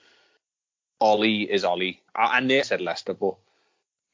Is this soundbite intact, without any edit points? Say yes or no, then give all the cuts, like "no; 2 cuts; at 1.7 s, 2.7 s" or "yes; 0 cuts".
no; 2 cuts; at 2.1 s, 2.6 s